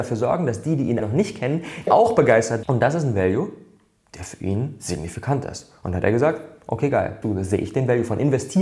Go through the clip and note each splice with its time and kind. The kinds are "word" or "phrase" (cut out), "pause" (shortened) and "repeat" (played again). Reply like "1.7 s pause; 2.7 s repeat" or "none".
1.0 s word; 1.9 s word; 2.6 s word; 7.2 s word